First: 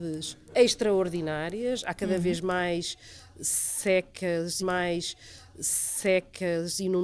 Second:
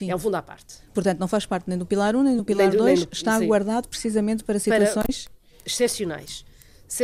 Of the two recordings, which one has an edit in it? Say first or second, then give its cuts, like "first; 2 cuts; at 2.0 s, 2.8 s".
first; 1 cut; at 4.6 s